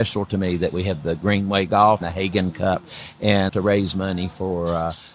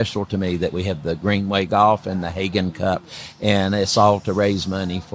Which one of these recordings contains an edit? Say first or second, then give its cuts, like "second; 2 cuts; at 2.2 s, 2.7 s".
first; 2 cuts; at 2.0 s, 3.5 s